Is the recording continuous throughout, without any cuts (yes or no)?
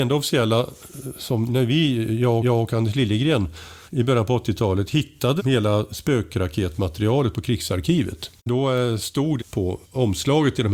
no